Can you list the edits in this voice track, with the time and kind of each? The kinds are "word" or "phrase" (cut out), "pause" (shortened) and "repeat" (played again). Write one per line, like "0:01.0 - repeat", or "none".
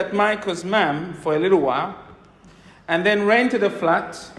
none